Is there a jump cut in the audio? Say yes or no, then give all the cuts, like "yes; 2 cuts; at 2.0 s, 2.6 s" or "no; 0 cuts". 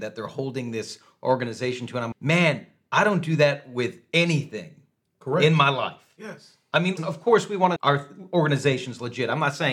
yes; 3 cuts; at 2.1 s, 7.0 s, 7.8 s